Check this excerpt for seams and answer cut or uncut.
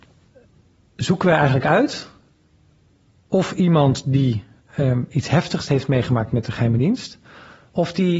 uncut